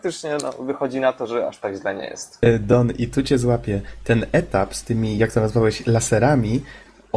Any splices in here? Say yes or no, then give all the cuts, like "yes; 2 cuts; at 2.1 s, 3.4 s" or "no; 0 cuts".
no; 0 cuts